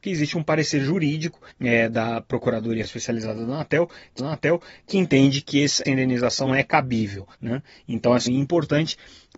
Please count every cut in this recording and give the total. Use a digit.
7